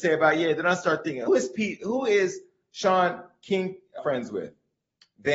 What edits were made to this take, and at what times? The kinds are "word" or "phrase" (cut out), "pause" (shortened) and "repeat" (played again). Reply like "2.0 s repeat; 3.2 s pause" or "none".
1.3 s word; 4.0 s word